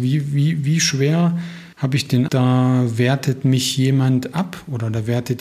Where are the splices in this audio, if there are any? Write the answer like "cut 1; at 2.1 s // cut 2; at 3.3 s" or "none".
cut 1; at 1.7 s // cut 2; at 2.3 s